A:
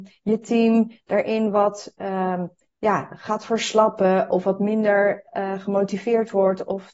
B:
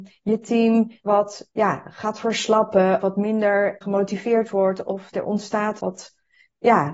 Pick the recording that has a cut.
B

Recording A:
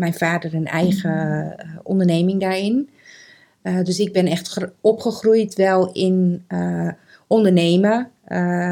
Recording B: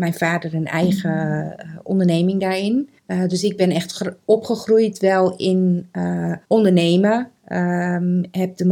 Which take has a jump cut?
B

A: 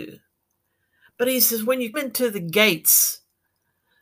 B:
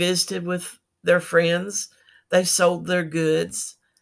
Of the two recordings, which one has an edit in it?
A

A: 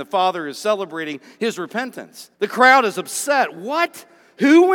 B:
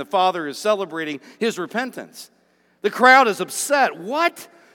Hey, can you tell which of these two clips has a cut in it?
A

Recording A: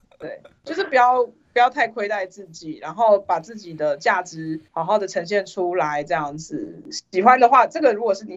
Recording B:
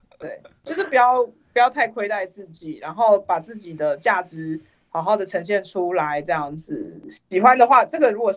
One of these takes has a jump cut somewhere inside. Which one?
A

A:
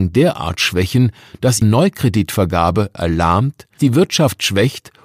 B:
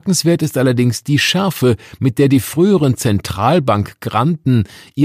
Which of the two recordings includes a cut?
A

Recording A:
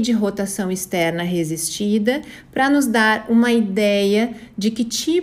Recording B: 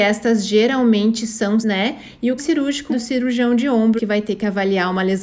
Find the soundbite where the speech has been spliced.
B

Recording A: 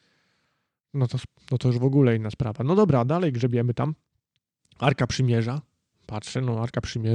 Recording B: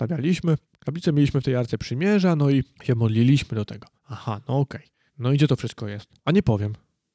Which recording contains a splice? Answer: B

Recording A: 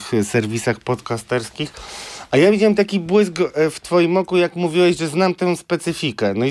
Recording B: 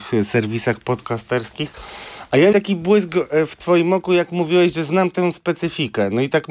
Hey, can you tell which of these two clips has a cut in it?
B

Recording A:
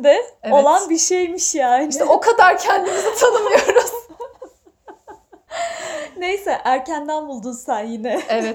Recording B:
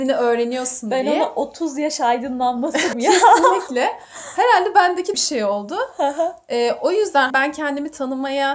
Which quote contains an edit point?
B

